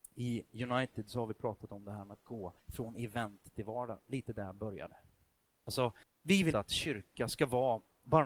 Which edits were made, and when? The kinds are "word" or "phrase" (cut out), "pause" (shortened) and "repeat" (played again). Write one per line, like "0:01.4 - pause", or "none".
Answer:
0:02.6 - pause
0:06.0 - pause
0:06.5 - word